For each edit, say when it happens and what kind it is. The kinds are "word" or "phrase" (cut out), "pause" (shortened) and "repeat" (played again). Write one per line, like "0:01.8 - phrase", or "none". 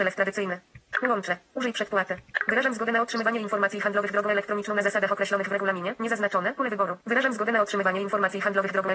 0:07.0 - pause

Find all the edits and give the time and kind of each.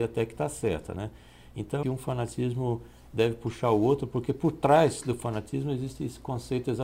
0:01.8 - phrase

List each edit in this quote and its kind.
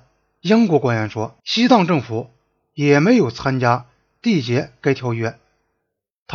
0:01.4 - pause

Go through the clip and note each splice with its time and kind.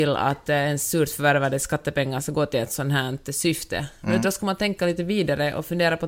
0:04.2 - word

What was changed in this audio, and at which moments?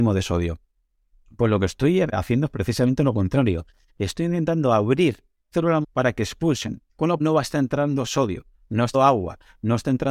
0:02.1 - word
0:05.5 - word
0:05.8 - word
0:06.9 - pause
0:07.2 - word
0:08.9 - word

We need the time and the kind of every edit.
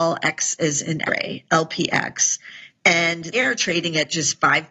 0:01.1 - word
0:03.3 - word

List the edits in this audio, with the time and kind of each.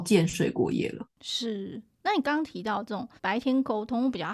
0:03.2 - pause

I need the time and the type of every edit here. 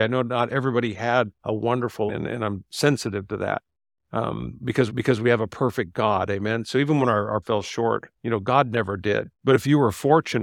0:01.4 - pause
0:02.1 - word
0:04.9 - repeat
0:07.4 - word
0:08.1 - pause
0:09.3 - pause

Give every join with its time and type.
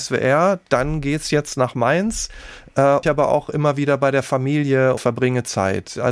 0:03.0 - phrase
0:05.0 - word

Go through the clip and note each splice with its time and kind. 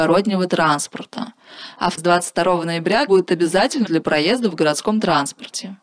0:02.0 - word
0:03.1 - word
0:03.9 - word

